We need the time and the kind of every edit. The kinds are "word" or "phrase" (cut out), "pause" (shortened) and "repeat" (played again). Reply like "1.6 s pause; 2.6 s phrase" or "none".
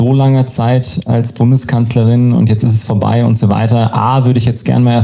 none